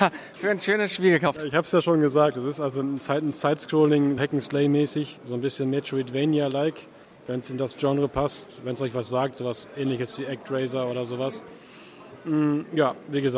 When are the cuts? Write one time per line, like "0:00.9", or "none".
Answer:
0:04.2
0:07.0